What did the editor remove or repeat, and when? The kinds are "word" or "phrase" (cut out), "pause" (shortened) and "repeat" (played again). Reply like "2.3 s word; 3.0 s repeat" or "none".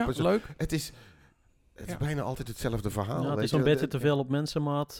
none